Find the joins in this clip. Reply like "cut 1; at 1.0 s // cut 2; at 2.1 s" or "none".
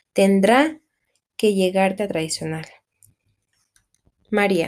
cut 1; at 2.0 s